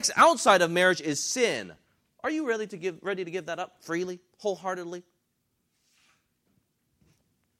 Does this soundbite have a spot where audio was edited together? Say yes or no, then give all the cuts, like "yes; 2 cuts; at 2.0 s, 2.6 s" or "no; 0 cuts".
no; 0 cuts